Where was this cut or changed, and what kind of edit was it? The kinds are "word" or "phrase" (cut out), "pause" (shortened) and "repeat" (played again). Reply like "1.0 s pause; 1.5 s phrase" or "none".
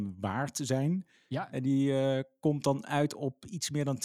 none

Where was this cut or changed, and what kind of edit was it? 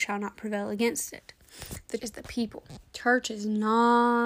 2.0 s word; 2.9 s pause

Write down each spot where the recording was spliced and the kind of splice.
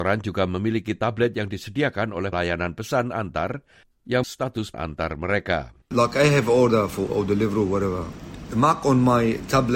2.3 s word; 4.2 s phrase; 4.7 s word; 5.8 s pause; 7.1 s phrase

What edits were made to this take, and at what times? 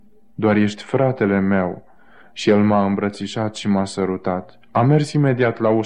none

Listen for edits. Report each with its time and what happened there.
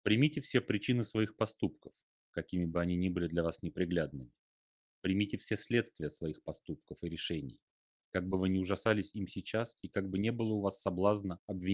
none

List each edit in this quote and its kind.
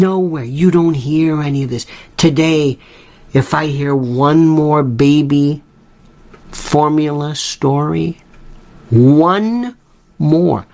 none

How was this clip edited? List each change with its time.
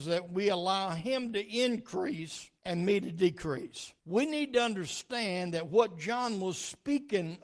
2.6 s pause; 4.0 s pause

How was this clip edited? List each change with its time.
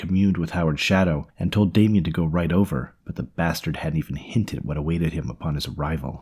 1.3 s pause; 3.0 s pause

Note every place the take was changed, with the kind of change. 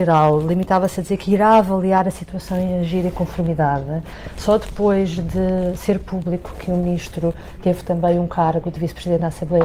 none

